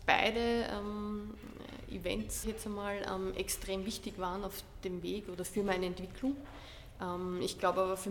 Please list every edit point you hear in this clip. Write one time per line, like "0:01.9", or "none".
0:02.4